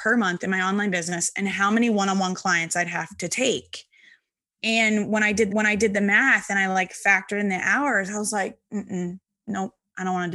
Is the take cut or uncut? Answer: cut